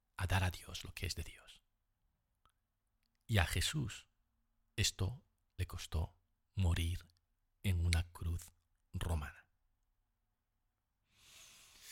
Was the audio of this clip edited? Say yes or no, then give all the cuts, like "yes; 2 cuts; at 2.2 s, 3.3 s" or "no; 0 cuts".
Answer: no; 0 cuts